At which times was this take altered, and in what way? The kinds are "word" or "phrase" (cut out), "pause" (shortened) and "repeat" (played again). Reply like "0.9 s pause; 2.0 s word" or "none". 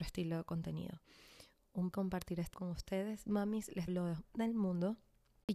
1.9 s word; 2.5 s word; 3.9 s word; 4.2 s word